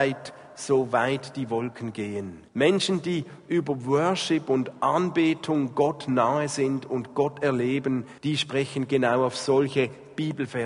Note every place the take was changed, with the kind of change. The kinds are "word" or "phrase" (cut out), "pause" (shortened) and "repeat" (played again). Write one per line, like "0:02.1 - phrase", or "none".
0:02.5 - pause
0:08.2 - pause